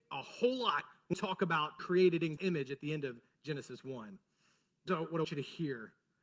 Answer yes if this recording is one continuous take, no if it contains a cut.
no